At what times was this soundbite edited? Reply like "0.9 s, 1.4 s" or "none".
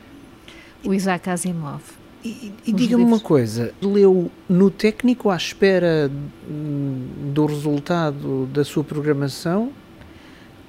2.0 s, 3.8 s

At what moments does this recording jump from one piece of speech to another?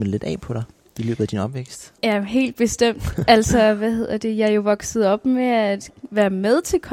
2.0 s

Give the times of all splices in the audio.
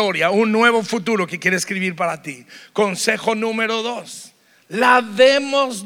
none

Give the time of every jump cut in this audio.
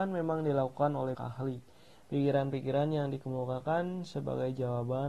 1.1 s

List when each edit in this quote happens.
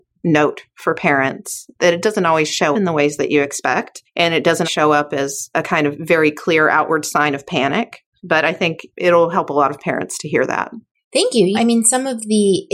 2.7 s, 4.1 s, 4.6 s, 11.5 s

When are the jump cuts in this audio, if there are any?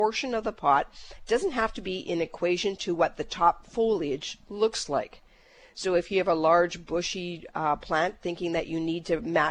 none

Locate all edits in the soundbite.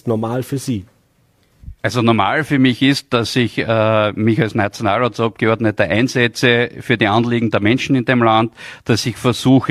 1.8 s

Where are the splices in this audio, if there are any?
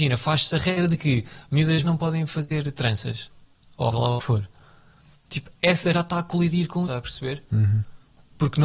1.8 s, 3.9 s, 5.9 s, 6.8 s

